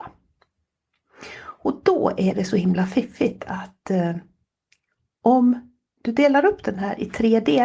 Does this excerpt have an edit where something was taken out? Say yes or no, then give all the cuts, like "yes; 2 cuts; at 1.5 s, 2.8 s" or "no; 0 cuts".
no; 0 cuts